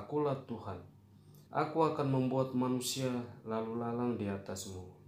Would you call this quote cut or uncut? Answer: cut